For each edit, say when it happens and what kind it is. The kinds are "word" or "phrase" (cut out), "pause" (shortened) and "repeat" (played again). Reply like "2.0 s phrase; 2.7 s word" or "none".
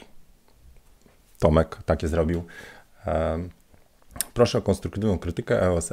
2.0 s word